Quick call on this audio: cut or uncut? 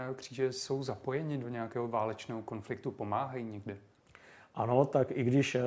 uncut